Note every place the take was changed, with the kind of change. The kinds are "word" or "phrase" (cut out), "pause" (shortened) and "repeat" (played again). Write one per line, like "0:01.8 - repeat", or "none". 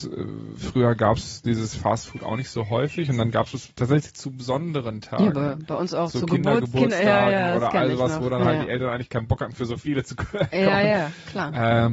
none